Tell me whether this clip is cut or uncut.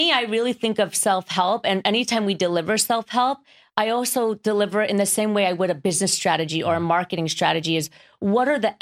uncut